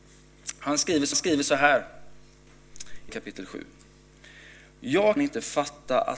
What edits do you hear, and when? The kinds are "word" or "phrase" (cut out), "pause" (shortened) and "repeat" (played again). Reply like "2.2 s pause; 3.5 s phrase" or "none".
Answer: 1.1 s repeat; 3.1 s word; 5.2 s word